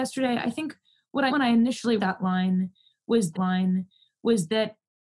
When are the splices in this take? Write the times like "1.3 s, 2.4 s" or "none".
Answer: 1.3 s, 2.0 s, 3.3 s